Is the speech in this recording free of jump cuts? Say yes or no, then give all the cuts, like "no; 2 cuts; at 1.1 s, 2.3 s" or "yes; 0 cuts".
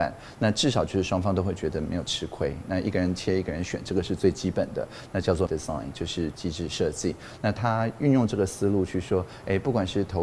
no; 1 cut; at 5.5 s